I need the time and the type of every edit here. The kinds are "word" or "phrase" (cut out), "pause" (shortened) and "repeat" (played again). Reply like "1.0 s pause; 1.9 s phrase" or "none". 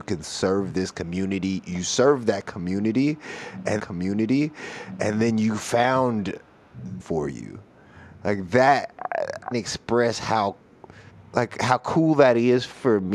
3.8 s repeat; 7.0 s phrase; 9.5 s phrase; 11.1 s pause

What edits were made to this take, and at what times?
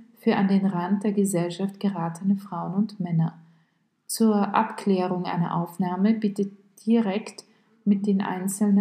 none

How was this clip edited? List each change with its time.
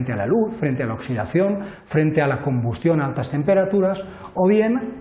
none

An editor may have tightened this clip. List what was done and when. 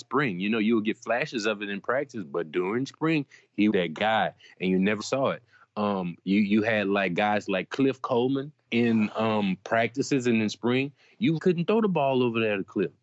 3.7 s word; 5.0 s word; 8.7 s word; 11.4 s word

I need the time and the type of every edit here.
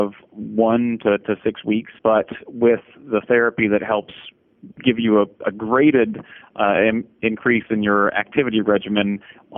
2.0 s pause; 4.7 s pause

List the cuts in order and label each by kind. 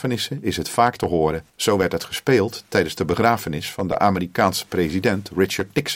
1.5 s pause

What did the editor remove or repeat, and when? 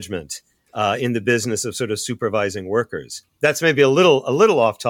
none

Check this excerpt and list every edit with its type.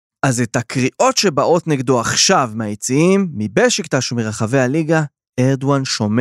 none

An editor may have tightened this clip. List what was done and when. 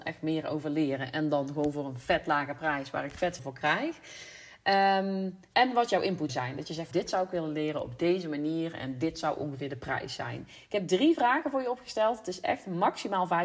3.4 s word; 6.3 s word; 6.9 s word

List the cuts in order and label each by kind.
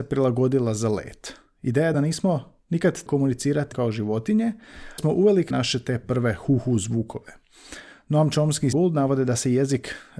1.9 s word; 3.1 s word; 3.7 s word; 5.0 s word; 5.5 s word; 8.7 s word

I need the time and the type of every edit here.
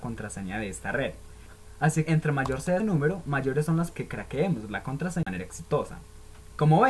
2.1 s word; 2.8 s word; 3.9 s word; 5.2 s word

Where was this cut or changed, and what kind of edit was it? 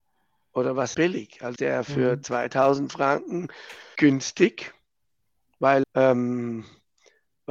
0.9 s word; 1.6 s word; 4.0 s word; 5.8 s word

